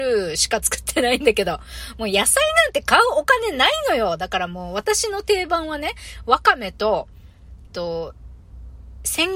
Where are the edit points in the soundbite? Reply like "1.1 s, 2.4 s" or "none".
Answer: 7.7 s